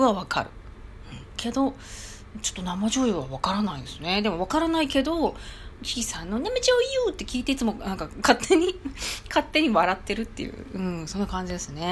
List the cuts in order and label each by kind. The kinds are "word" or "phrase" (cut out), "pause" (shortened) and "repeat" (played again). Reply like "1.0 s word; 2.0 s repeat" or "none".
5.8 s word